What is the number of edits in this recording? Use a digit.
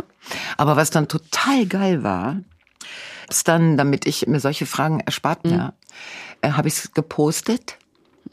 3